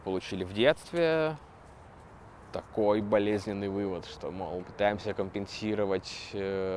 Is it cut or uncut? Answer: cut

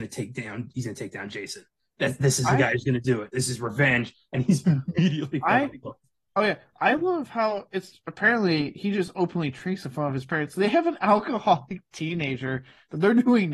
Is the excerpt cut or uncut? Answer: uncut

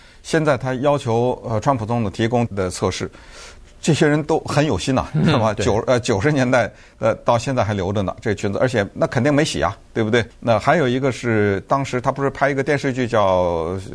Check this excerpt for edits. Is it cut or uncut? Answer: cut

